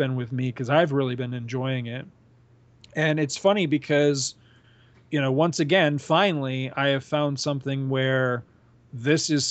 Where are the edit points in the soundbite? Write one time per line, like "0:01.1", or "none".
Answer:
none